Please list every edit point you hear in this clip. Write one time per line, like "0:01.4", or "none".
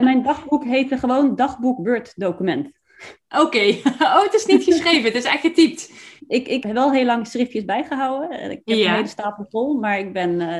0:06.2
0:06.6